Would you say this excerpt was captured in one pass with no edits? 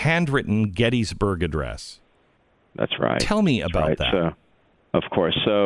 yes; 0 cuts

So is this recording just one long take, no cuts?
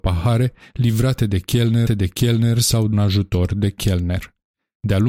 no; 2 cuts; at 1.9 s, 2.9 s

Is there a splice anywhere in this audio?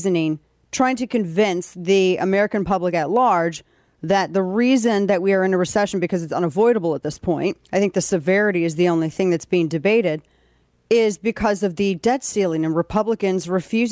yes; 1 cut; at 7.6 s

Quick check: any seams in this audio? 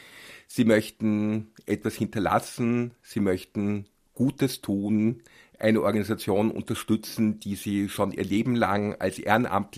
no; 0 cuts

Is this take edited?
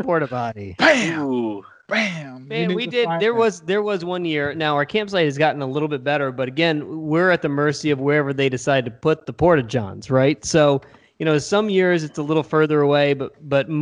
no; 0 cuts

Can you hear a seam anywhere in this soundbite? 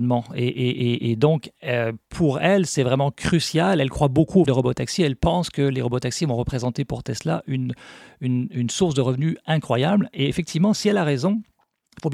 yes; 1 cut; at 4.5 s

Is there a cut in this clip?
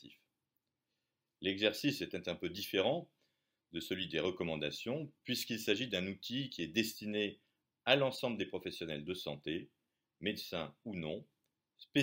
no; 0 cuts

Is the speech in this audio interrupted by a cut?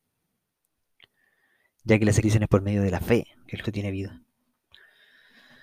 yes; 2 cuts; at 2.2 s, 3.6 s

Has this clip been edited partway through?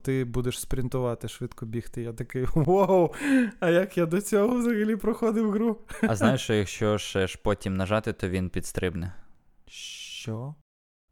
no; 0 cuts

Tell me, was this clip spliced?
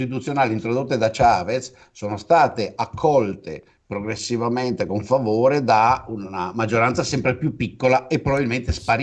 no; 0 cuts

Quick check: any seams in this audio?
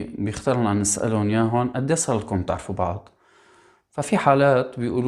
no; 0 cuts

